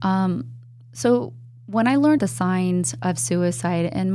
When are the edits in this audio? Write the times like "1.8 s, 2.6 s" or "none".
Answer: 1.6 s, 2.2 s, 3.0 s

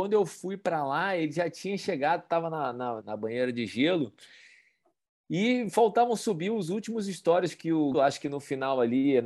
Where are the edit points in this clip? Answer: 3.0 s, 7.9 s

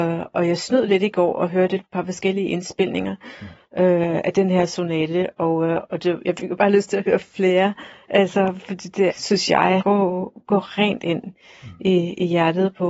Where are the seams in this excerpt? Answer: 9.1 s, 9.8 s

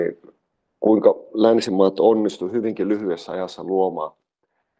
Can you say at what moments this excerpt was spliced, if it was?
none

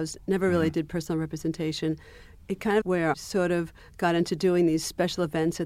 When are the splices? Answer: 2.8 s, 3.1 s

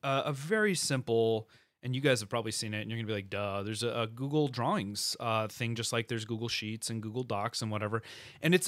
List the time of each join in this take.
none

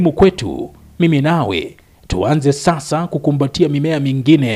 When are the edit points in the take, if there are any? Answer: none

